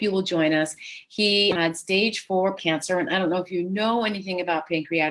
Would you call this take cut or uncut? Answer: cut